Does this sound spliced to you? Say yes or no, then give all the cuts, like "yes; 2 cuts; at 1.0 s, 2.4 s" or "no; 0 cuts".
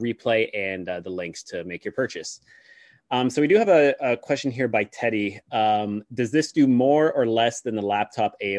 no; 0 cuts